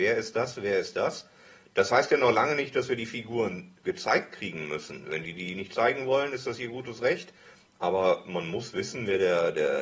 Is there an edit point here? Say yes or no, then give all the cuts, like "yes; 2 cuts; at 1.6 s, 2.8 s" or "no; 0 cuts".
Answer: no; 0 cuts